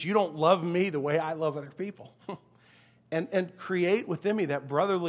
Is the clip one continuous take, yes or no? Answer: yes